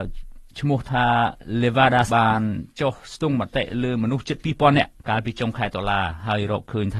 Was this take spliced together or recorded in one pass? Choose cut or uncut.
cut